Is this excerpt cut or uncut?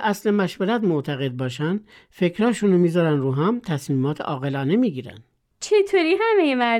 uncut